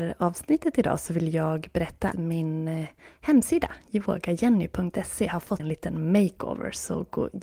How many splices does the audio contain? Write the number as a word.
two